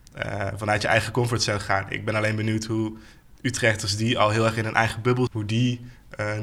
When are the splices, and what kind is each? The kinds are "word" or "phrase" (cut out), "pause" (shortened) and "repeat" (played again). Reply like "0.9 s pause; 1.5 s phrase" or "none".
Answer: 3.3 s word; 5.3 s word